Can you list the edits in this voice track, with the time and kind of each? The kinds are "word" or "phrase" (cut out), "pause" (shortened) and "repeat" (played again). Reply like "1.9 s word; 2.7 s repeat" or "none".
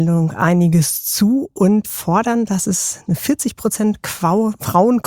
none

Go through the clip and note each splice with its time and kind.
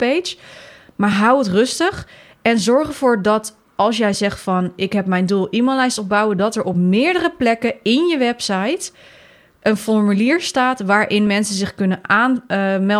none

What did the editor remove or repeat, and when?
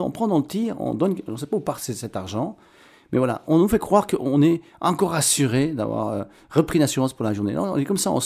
3.4 s word

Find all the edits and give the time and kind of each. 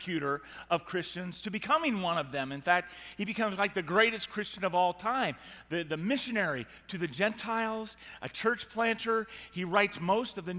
none

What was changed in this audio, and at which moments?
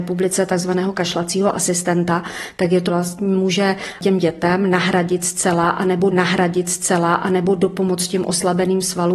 2.9 s phrase; 6.1 s repeat

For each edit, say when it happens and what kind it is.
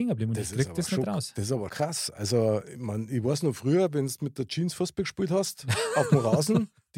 1.7 s word

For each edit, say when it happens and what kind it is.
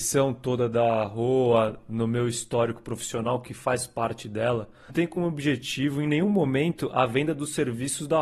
4.9 s phrase

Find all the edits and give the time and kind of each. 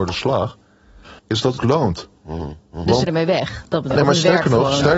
1.2 s pause; 1.6 s word; 2.1 s pause; 3.1 s word; 3.9 s word

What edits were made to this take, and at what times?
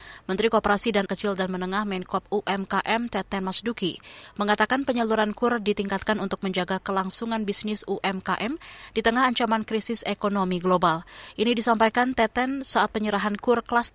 1.1 s word

